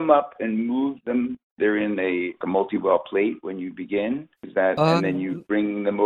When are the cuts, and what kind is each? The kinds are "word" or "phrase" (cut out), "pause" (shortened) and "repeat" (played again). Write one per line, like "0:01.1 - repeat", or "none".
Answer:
0:01.5 - pause
0:04.3 - pause